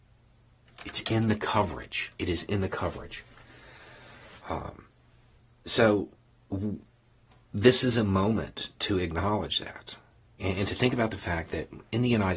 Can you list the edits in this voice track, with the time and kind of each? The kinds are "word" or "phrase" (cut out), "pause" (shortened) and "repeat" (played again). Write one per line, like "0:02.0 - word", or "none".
0:02.1 - pause
0:05.4 - pause